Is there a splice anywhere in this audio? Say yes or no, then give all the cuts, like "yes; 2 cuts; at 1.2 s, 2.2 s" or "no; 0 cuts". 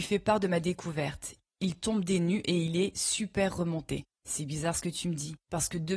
no; 0 cuts